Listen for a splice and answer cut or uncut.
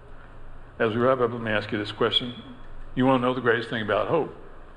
uncut